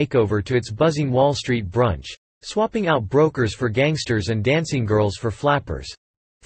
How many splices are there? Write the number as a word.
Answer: zero